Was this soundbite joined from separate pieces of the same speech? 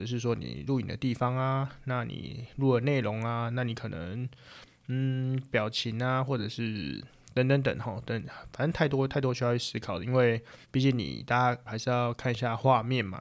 yes; 2 cuts; at 10.6 s, 11.7 s

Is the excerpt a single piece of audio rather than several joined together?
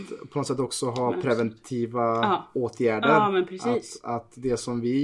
yes; 0 cuts

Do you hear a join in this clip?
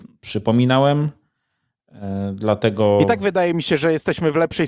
no; 0 cuts

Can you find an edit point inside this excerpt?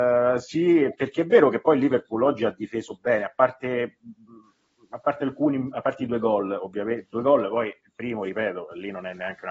no; 0 cuts

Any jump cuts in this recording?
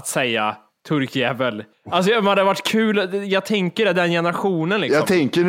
yes; 1 cut; at 1.7 s

